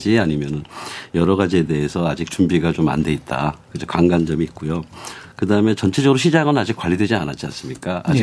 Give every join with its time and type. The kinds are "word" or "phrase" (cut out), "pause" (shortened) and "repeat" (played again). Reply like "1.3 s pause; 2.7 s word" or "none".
none